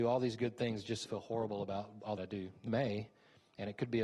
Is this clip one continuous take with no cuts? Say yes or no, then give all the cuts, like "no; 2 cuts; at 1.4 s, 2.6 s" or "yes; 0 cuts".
no; 3 cuts; at 1.0 s, 2.2 s, 2.7 s